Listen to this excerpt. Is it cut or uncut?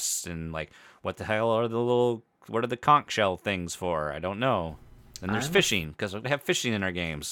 cut